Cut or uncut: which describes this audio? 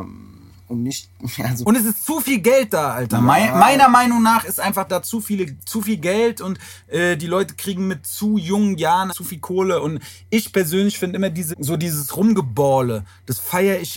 cut